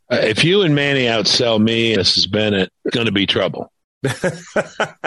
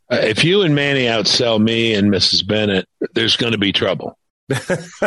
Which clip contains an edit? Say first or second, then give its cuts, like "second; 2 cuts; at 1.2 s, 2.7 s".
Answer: first; 2 cuts; at 2.0 s, 2.9 s